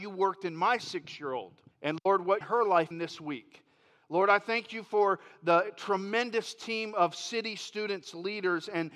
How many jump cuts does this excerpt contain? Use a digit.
3